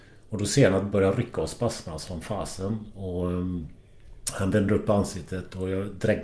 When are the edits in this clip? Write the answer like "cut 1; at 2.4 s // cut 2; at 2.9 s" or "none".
cut 1; at 0.9 s